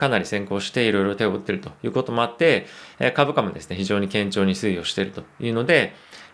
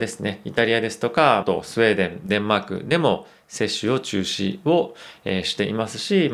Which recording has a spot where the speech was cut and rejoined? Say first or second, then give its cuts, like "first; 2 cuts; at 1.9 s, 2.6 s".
second; 1 cut; at 1.4 s